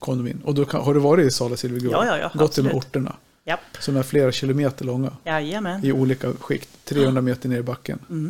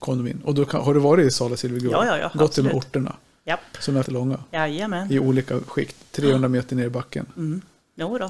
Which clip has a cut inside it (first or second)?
second